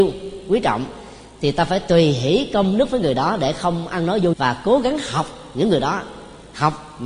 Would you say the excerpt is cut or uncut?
cut